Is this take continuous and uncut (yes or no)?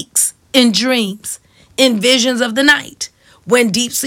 yes